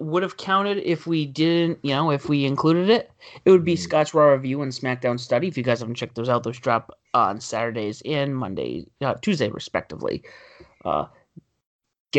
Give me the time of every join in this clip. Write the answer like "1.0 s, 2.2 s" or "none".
none

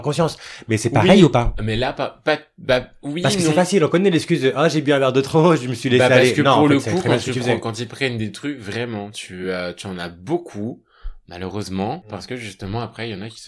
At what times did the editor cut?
none

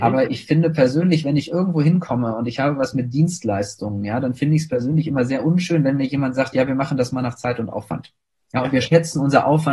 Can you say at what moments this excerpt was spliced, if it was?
none

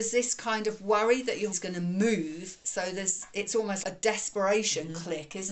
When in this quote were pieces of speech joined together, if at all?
1.5 s, 3.8 s

